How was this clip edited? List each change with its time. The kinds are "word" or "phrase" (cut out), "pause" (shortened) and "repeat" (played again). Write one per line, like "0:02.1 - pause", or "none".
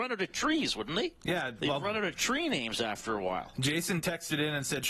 0:01.6 - word